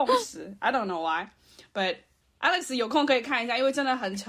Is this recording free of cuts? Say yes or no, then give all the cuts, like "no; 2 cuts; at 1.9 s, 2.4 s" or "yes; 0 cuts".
yes; 0 cuts